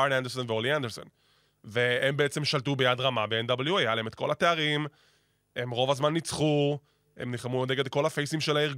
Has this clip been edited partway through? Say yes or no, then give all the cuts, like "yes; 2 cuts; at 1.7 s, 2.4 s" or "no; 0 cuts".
no; 0 cuts